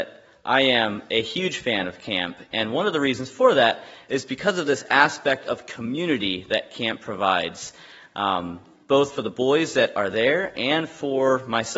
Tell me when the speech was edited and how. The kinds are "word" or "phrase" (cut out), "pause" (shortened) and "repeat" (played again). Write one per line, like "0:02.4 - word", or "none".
none